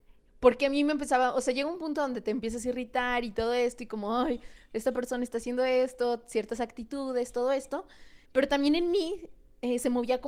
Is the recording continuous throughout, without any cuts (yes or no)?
no